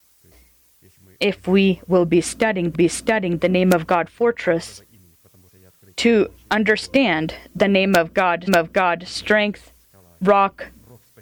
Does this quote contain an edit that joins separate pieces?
yes; 3 cuts; at 2.7 s, 5.5 s, 8.5 s

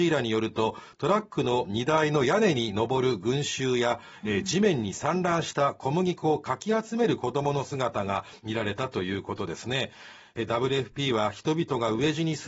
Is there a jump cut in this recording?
no; 0 cuts

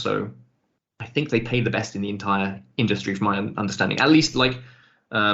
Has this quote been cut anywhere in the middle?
no; 0 cuts

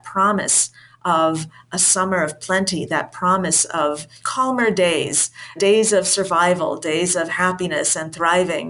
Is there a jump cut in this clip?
yes; 1 cut; at 5.6 s

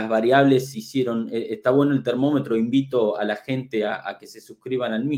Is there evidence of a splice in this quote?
no; 0 cuts

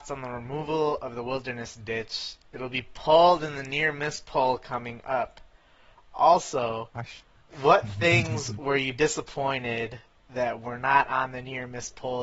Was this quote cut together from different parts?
no; 0 cuts

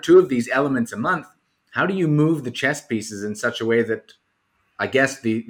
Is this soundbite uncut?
yes; 0 cuts

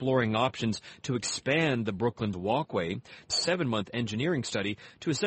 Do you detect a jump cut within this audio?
yes; 2 cuts; at 2.3 s, 3.3 s

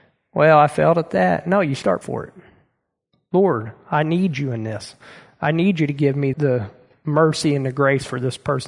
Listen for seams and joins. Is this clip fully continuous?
no; 2 cuts; at 2.0 s, 6.3 s

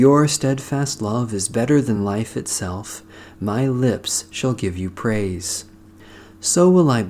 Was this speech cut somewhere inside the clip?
no; 0 cuts

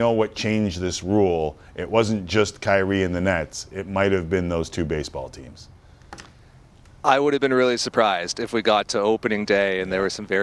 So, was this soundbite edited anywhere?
no; 0 cuts

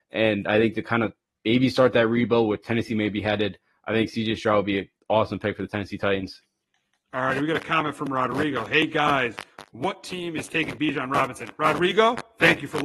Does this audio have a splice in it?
no; 0 cuts

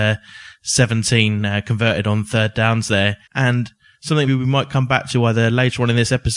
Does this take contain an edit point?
yes; 2 cuts; at 3.2 s, 4.3 s

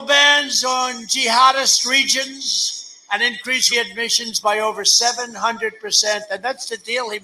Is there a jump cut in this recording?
yes; 1 cut; at 3.7 s

